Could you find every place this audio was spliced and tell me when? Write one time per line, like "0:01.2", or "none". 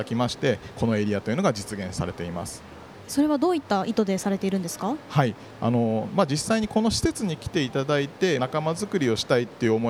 0:08.4